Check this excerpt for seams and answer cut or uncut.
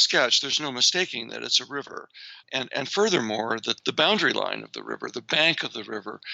uncut